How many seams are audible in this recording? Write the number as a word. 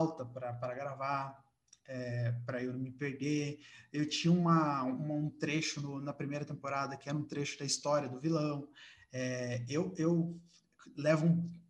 zero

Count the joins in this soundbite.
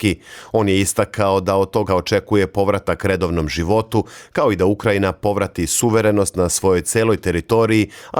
one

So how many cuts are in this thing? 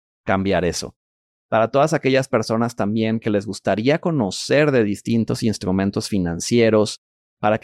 zero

